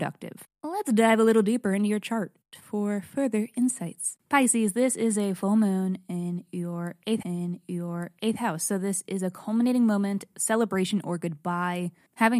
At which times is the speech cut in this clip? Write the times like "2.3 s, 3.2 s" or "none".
7.2 s, 10.3 s

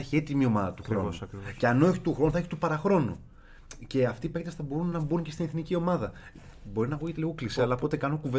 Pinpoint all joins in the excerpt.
none

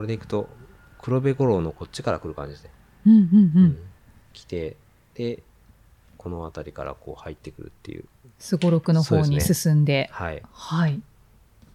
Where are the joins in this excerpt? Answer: none

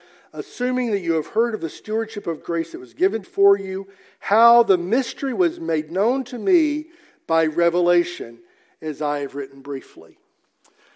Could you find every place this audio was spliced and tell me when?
2.4 s, 3.2 s

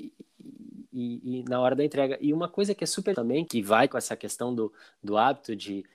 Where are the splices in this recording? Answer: 3.1 s, 3.5 s, 3.9 s

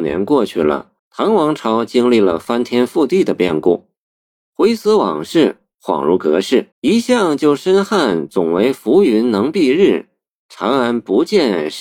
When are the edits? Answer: 1.0 s, 6.7 s

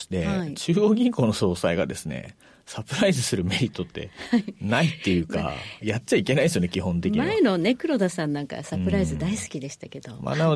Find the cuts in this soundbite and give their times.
none

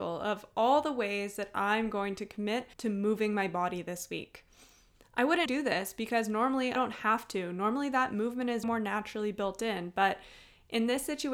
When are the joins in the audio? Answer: 2.7 s, 5.5 s, 6.8 s, 8.6 s

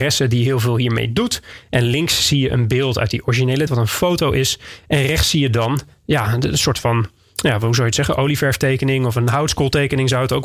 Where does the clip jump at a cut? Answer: 3.7 s

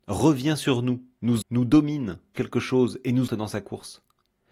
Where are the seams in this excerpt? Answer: 1.4 s, 2.3 s, 3.3 s

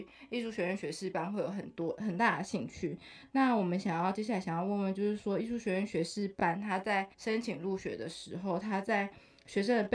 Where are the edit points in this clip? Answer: 7.1 s

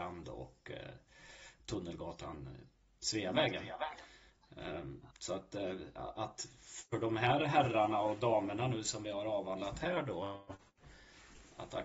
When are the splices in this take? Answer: 5.1 s

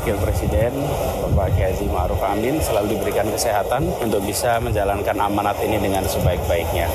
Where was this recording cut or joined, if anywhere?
none

